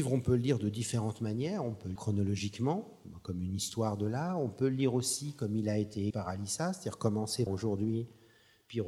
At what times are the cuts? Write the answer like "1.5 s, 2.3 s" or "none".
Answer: 2.0 s, 6.1 s, 7.5 s